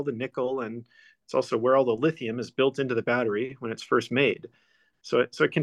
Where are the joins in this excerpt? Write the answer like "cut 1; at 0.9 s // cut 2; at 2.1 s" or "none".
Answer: none